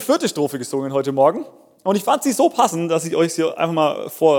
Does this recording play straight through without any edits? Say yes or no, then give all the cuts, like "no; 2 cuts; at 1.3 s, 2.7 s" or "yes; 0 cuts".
yes; 0 cuts